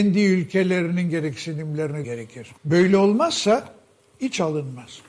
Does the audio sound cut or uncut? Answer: cut